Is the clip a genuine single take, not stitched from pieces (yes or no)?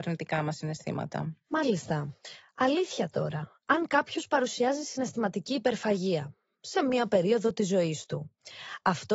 yes